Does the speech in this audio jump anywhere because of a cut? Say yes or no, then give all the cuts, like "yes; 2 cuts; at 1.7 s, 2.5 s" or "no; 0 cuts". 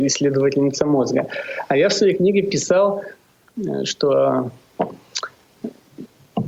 no; 0 cuts